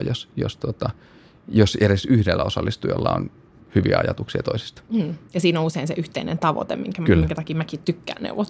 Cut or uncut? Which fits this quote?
uncut